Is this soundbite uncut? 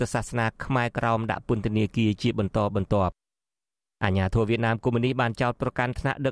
yes; 0 cuts

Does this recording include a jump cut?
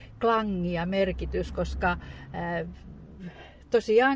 no; 0 cuts

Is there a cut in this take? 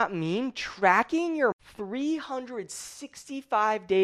yes; 1 cut; at 1.5 s

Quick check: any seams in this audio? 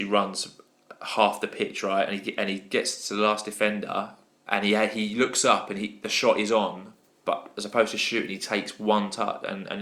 no; 0 cuts

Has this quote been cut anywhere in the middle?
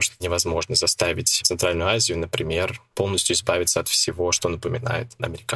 no; 0 cuts

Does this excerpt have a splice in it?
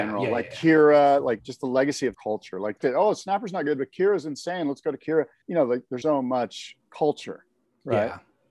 yes; 4 cuts; at 2.1 s, 2.8 s, 5.4 s, 6.0 s

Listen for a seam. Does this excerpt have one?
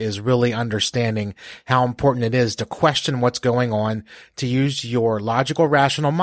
no; 0 cuts

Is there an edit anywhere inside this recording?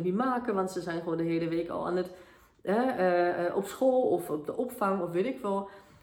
no; 0 cuts

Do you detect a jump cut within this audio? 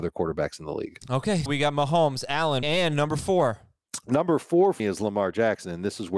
yes; 3 cuts; at 1.5 s, 2.6 s, 4.8 s

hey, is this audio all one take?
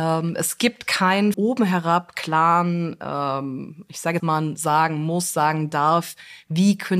no; 2 cuts; at 1.3 s, 4.2 s

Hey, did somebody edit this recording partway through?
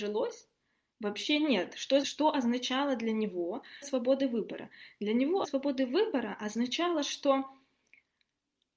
yes; 3 cuts; at 2.0 s, 3.8 s, 5.4 s

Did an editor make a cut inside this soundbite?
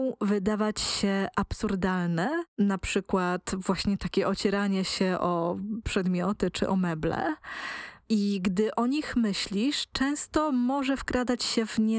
yes; 2 cuts; at 2.5 s, 8.0 s

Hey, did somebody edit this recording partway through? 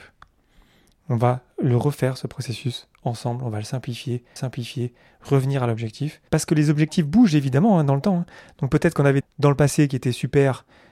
yes; 3 cuts; at 4.4 s, 6.3 s, 9.2 s

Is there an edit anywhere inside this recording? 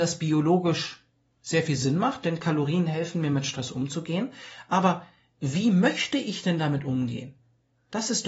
no; 0 cuts

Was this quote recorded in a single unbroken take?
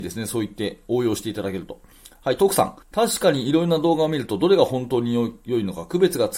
no; 1 cut; at 2.8 s

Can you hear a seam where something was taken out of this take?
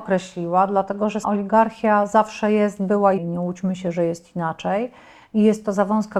yes; 2 cuts; at 1.2 s, 3.2 s

